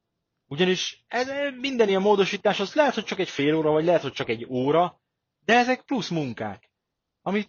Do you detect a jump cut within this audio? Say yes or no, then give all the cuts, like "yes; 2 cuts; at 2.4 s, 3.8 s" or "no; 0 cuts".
no; 0 cuts